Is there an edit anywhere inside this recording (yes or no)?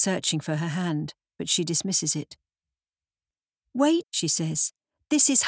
yes